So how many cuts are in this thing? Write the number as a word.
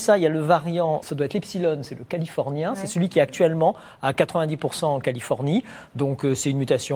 one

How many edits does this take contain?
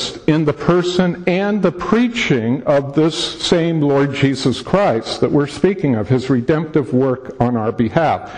zero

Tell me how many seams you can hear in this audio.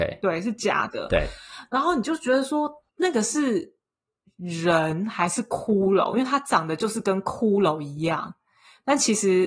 one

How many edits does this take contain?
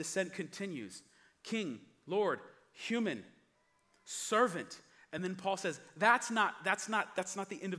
zero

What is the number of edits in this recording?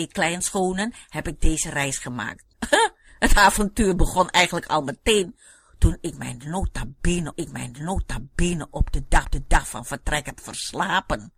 three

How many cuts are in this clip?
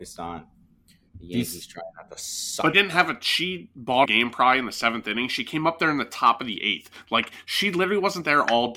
two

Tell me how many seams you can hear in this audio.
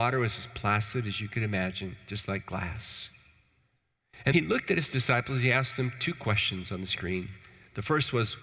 one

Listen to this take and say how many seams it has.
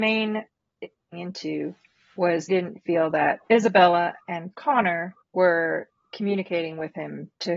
five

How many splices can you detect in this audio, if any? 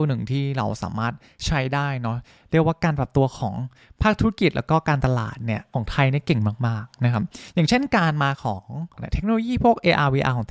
one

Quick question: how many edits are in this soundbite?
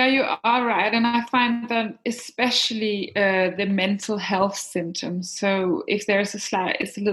zero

